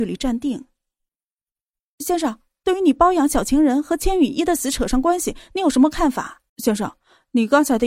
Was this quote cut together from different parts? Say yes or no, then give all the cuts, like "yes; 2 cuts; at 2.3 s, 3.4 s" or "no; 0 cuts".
yes; 1 cut; at 6.5 s